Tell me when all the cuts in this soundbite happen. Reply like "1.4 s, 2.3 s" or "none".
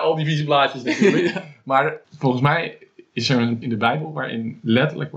3.6 s